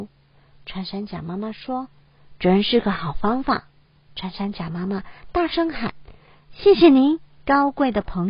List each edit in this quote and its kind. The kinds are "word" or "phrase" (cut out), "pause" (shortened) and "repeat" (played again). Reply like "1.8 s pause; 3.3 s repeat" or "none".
3.7 s pause